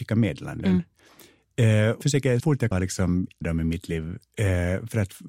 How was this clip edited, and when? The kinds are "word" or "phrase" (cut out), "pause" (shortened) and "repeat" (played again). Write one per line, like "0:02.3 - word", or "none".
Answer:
0:02.0 - word
0:02.4 - word
0:02.7 - word
0:03.4 - word